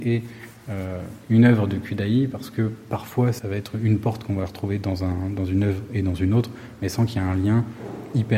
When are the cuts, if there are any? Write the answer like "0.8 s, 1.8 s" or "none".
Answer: none